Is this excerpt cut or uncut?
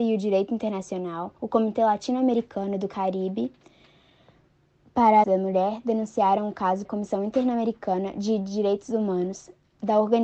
cut